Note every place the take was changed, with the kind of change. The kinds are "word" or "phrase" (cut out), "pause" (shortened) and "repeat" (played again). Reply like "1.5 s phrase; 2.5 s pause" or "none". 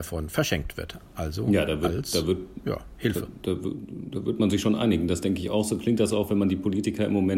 none